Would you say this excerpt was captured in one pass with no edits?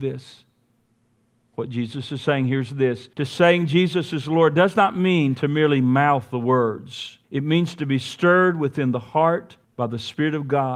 no; 3 cuts; at 3.1 s, 7.2 s, 9.6 s

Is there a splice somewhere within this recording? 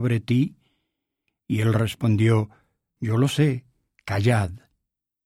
yes; 1 cut; at 3.0 s

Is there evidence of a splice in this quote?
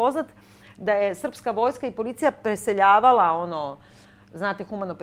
no; 0 cuts

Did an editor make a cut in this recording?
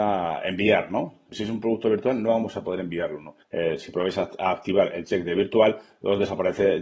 yes; 1 cut; at 3.4 s

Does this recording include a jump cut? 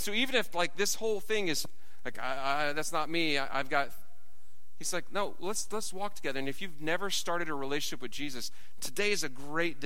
no; 0 cuts

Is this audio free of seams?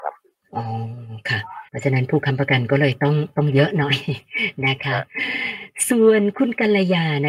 no; 1 cut; at 1.7 s

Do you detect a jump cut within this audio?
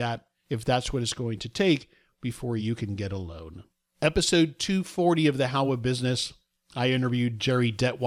no; 0 cuts

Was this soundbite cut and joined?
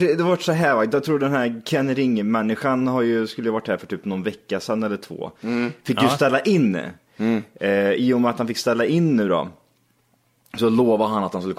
no; 0 cuts

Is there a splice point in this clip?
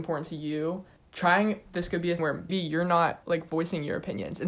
yes; 4 cuts; at 1.0 s, 1.7 s, 2.2 s, 2.5 s

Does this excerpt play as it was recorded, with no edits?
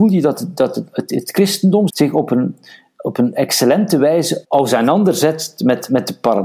no; 2 cuts; at 1.9 s, 4.4 s

